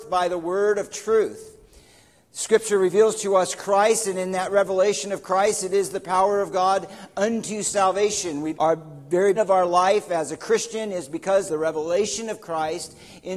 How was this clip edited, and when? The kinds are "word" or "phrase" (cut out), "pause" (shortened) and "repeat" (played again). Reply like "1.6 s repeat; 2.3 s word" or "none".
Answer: 8.5 s word; 9.3 s word; 11.5 s word